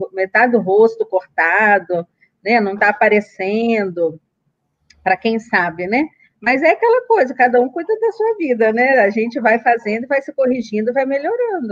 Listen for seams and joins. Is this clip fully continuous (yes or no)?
yes